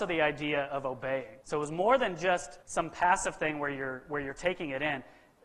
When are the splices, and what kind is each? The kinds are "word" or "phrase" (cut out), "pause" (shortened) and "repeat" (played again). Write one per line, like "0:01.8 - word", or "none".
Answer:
0:01.4 - pause
0:02.6 - pause

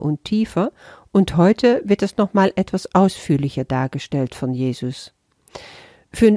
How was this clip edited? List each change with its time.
none

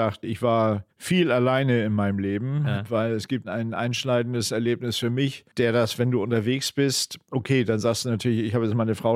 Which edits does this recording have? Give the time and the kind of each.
0:00.9 - pause
0:05.5 - pause

